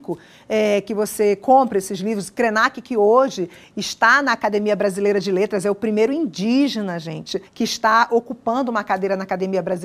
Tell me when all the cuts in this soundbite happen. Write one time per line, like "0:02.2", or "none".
0:07.5